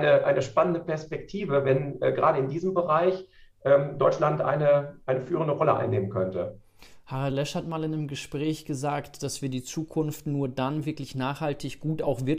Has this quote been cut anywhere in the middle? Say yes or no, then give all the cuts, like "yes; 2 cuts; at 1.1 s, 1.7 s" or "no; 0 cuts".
no; 0 cuts